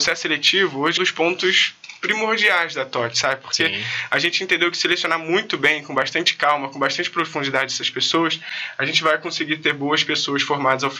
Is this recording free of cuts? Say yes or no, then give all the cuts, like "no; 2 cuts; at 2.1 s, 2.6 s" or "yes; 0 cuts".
no; 1 cut; at 1.0 s